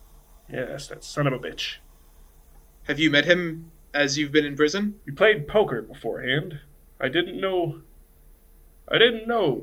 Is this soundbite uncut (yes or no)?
no